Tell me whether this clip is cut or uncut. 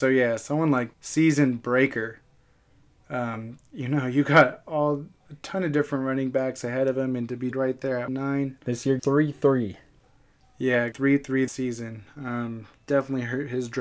cut